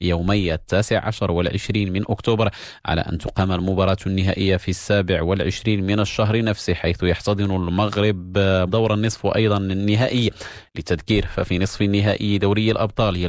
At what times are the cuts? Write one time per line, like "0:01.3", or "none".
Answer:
0:08.7